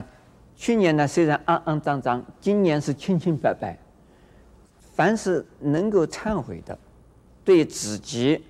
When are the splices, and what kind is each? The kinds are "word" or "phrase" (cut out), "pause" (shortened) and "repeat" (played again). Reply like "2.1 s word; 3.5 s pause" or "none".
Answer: 7.3 s phrase